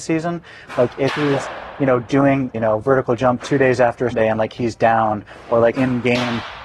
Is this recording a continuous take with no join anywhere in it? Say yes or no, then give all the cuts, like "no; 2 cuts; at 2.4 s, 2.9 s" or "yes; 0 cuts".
no; 4 cuts; at 2.5 s, 3.4 s, 4.1 s, 5.7 s